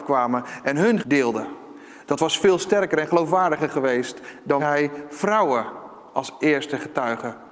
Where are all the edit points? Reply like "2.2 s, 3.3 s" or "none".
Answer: 1.0 s, 4.6 s